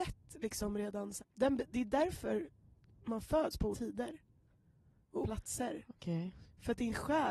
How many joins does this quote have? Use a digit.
3